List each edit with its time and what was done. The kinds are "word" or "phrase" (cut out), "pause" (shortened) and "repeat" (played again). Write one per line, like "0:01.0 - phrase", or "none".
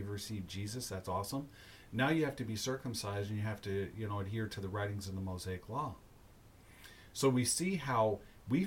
none

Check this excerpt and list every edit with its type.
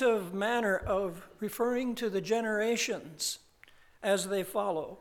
none

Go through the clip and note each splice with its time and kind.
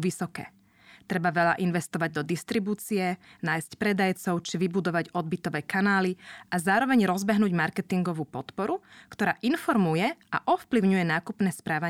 none

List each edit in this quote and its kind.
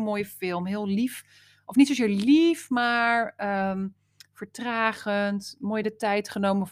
none

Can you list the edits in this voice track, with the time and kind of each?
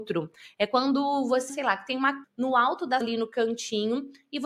0:01.5 - word
0:02.2 - word
0:03.0 - word

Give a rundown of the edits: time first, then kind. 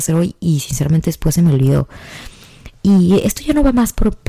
none

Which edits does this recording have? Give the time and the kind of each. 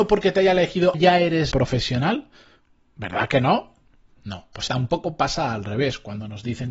0:00.9 - word
0:01.5 - word
0:04.7 - word

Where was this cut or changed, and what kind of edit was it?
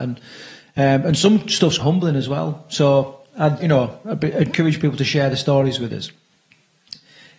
0:01.8 - word
0:03.6 - word

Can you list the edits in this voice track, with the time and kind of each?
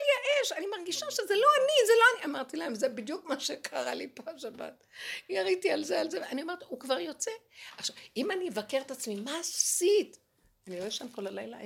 none

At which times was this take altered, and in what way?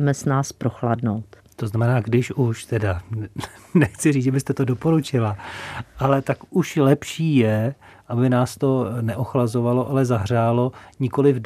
none

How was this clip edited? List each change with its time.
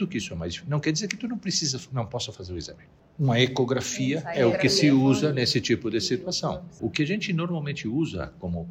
none

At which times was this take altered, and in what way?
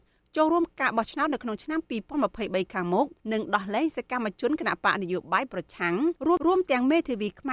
0:03.2 - pause
0:06.2 - pause

